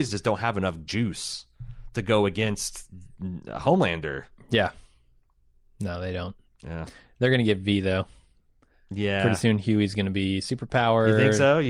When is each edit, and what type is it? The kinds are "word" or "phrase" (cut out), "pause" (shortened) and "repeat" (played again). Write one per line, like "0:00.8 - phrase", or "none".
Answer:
none